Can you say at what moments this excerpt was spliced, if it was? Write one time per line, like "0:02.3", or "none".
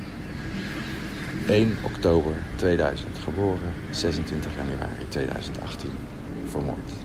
none